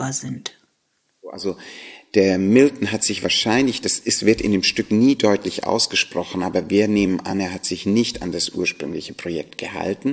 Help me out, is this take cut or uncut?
uncut